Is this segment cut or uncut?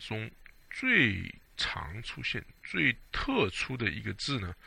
cut